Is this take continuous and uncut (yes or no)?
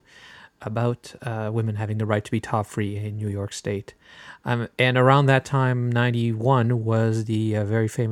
yes